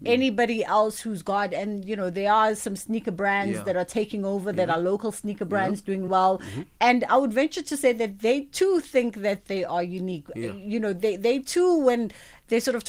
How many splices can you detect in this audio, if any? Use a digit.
1